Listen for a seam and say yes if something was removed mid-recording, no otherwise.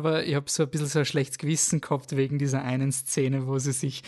no